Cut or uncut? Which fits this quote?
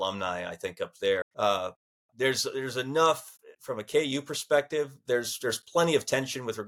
cut